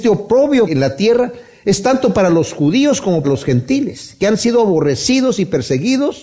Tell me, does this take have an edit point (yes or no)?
yes